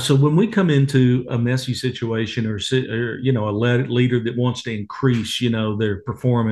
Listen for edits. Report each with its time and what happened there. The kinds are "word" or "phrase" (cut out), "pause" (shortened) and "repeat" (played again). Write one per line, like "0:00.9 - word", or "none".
none

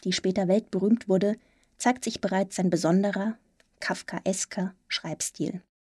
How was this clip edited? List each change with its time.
none

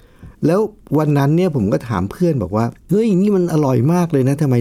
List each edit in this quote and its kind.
0:02.8 - pause

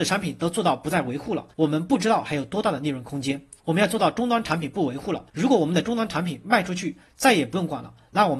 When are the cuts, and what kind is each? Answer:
0:01.5 - pause
0:03.6 - pause
0:05.3 - pause

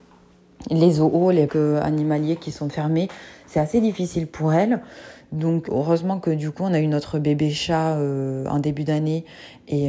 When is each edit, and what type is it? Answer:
0:01.5 - word
0:05.7 - word

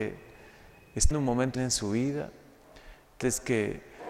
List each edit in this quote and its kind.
0:01.1 - word
0:01.5 - word
0:03.2 - word

